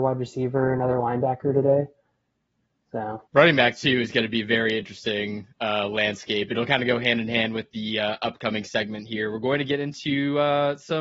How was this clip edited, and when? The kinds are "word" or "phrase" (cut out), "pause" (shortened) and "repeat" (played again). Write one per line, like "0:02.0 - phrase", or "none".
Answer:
0:03.3 - pause
0:05.5 - pause